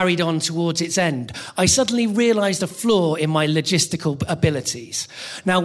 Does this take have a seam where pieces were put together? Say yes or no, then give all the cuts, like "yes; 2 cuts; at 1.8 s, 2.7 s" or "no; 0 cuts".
no; 0 cuts